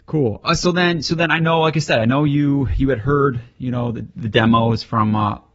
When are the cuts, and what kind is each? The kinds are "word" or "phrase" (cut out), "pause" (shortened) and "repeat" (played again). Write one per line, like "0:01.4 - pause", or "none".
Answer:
none